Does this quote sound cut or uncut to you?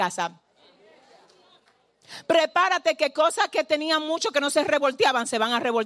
uncut